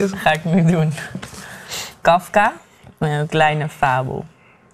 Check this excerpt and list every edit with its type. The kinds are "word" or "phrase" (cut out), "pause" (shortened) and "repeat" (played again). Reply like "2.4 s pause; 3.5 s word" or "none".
2.0 s phrase; 3.3 s word